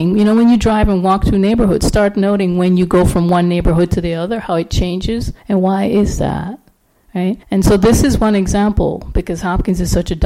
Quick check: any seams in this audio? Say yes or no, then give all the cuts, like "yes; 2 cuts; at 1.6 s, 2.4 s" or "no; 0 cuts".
yes; 2 cuts; at 5.4 s, 7.4 s